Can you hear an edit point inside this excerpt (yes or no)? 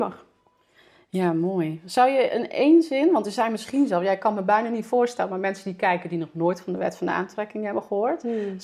no